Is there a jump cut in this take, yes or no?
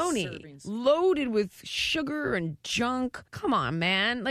yes